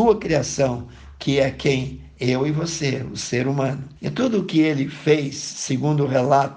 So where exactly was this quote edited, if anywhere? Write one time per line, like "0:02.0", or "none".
0:04.0